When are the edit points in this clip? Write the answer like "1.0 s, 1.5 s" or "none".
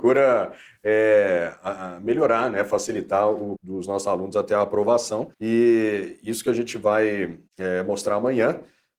3.6 s, 5.3 s, 7.5 s